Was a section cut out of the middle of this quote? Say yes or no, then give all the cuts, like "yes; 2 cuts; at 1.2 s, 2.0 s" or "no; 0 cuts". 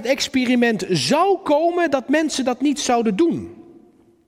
no; 0 cuts